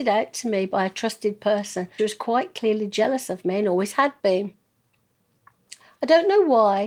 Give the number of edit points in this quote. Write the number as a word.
one